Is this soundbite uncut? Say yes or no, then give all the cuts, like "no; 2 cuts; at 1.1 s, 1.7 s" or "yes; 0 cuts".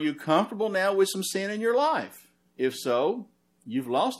yes; 0 cuts